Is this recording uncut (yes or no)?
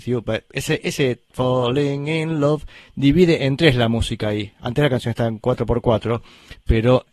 yes